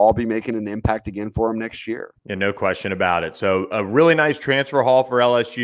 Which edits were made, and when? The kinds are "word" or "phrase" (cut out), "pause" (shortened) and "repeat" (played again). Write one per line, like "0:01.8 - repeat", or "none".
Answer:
0:02.2 - pause